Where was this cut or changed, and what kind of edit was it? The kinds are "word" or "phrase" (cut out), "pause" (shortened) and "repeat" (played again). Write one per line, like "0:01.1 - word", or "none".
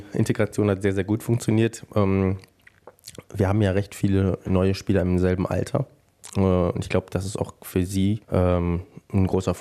0:08.2 - pause